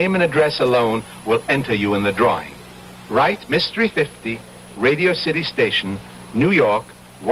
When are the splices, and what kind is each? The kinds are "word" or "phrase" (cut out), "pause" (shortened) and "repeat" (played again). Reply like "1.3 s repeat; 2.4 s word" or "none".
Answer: 3.9 s phrase